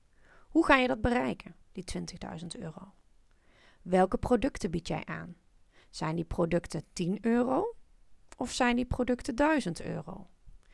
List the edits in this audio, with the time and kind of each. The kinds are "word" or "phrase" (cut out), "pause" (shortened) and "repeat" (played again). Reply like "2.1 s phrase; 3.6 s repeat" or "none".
1.6 s pause